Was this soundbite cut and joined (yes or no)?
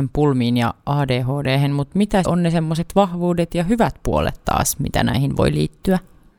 yes